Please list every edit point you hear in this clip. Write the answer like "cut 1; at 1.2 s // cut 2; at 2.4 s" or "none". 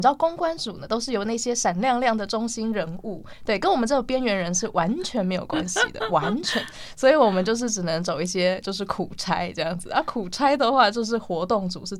none